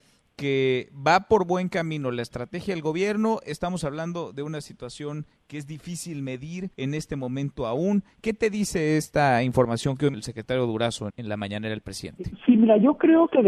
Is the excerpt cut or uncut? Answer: cut